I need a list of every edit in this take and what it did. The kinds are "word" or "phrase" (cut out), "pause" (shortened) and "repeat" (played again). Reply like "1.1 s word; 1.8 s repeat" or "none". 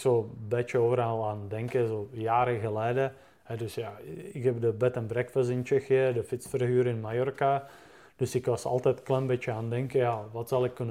none